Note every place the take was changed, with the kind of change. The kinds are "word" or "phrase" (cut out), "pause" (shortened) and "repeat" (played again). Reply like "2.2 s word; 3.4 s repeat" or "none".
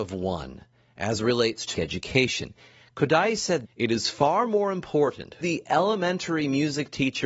1.7 s word; 3.6 s word; 5.4 s word